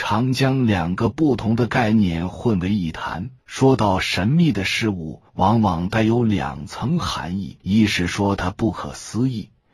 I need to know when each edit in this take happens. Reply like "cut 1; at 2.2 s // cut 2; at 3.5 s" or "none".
cut 1; at 3.4 s // cut 2; at 5.3 s // cut 3; at 7.6 s